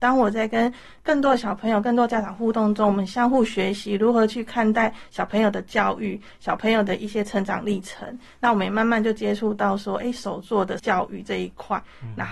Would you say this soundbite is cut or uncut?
cut